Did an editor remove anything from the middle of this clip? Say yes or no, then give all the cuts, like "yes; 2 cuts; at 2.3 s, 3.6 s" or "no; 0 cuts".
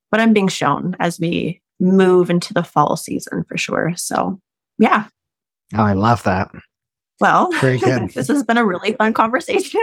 yes; 1 cut; at 1.7 s